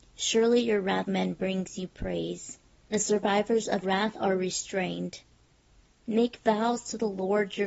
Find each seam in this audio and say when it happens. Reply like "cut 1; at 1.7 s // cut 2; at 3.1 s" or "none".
cut 1; at 1.0 s // cut 2; at 2.9 s // cut 3; at 3.8 s